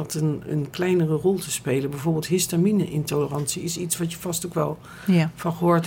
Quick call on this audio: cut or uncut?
uncut